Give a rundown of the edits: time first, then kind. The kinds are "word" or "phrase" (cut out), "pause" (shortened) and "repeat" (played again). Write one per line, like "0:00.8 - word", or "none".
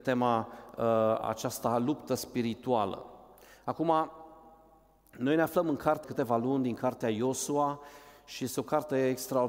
0:06.0 - phrase